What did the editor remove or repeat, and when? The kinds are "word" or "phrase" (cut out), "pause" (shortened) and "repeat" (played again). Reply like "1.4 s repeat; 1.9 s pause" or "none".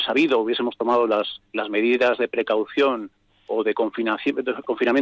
1.5 s pause